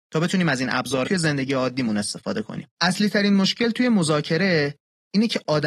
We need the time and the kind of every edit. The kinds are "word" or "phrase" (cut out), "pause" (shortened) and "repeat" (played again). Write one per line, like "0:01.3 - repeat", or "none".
0:01.0 - phrase
0:02.7 - pause